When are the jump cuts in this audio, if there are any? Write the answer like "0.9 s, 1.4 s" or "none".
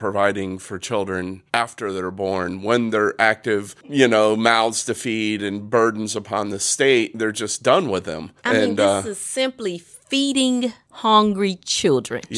1.5 s, 8.4 s